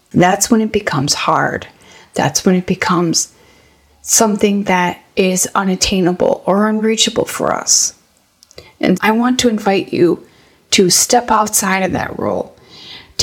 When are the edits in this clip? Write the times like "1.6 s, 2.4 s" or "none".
9.0 s

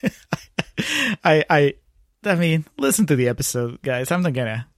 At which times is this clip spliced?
none

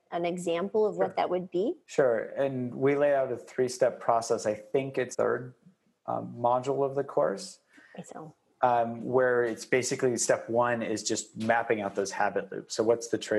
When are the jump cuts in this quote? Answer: 1.8 s, 5.1 s, 8.0 s

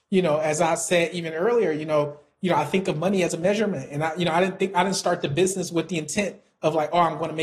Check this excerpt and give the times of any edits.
none

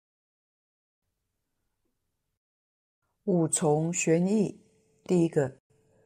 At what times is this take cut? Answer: none

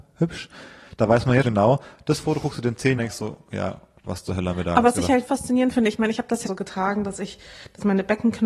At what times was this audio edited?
1.4 s, 3.0 s, 5.3 s, 6.5 s

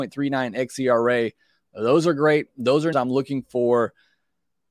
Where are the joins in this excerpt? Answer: 2.9 s

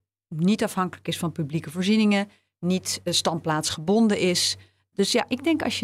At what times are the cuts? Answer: none

